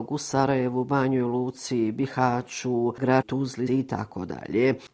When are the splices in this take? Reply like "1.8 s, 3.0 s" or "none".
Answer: 3.2 s, 3.7 s